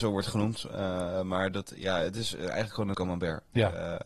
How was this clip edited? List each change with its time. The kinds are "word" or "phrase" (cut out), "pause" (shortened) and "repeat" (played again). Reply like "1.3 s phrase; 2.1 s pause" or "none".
2.9 s word

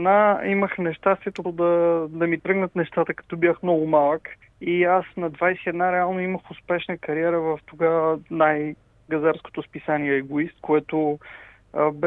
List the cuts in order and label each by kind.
1.4 s word; 4.4 s pause

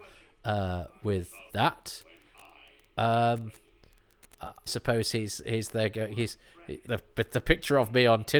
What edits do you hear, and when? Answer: 1.5 s word; 4.7 s phrase; 6.9 s phrase

